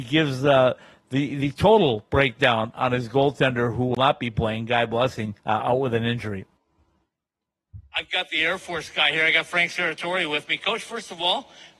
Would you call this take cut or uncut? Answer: cut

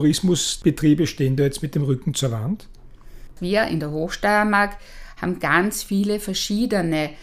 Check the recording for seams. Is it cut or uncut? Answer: uncut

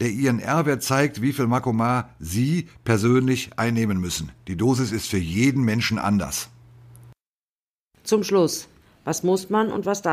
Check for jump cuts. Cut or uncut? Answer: uncut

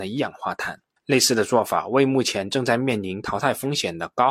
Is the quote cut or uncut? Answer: cut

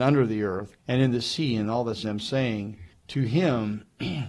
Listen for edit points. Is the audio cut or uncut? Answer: cut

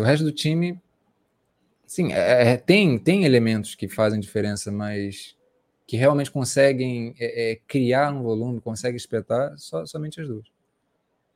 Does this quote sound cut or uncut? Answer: uncut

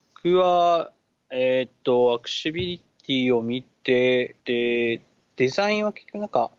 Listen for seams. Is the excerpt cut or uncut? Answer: cut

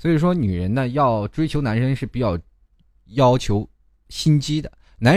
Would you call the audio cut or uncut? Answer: uncut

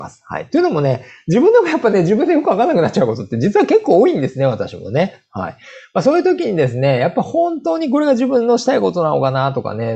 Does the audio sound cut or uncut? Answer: uncut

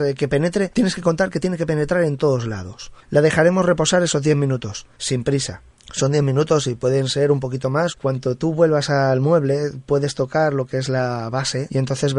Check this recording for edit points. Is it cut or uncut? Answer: uncut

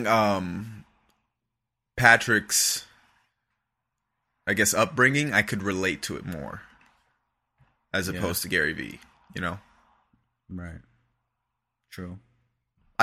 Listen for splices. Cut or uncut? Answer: uncut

